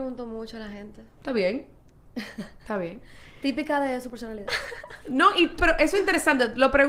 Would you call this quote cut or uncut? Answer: cut